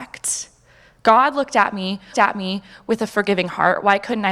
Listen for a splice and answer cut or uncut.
cut